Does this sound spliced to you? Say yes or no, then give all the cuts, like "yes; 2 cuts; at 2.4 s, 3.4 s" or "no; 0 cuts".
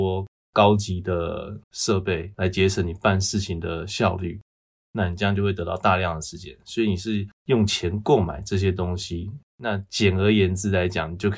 yes; 2 cuts; at 1.6 s, 7.4 s